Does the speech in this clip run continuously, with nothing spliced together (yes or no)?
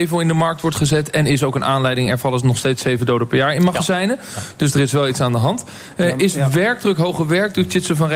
yes